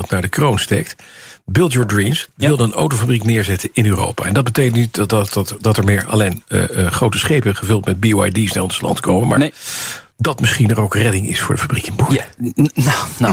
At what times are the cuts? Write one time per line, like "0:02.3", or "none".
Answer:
0:10.1